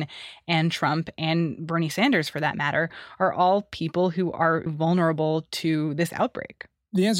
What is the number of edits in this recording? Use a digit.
1